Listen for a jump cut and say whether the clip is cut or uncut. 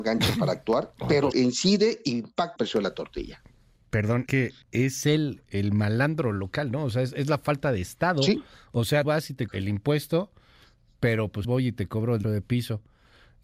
cut